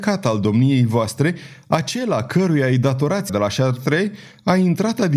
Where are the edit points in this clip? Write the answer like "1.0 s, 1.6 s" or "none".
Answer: 3.3 s